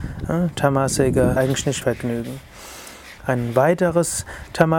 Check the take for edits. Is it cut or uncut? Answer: cut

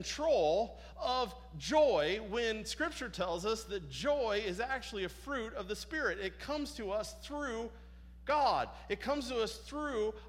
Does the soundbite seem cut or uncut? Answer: uncut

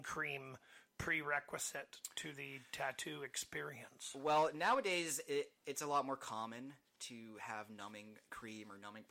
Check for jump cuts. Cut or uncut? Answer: uncut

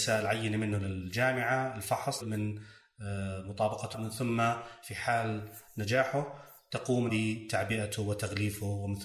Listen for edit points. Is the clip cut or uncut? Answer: cut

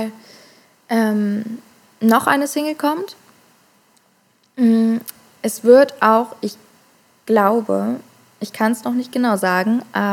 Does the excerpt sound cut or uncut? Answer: uncut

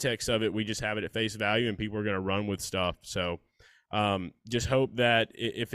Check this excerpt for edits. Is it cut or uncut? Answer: uncut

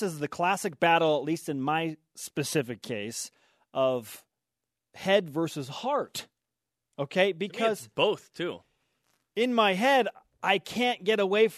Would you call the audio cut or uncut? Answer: uncut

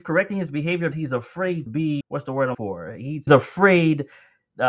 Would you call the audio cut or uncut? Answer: cut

